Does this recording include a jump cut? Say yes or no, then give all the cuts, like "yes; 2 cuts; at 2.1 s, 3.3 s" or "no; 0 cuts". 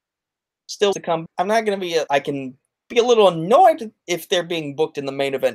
yes; 3 cuts; at 0.9 s, 1.3 s, 2.1 s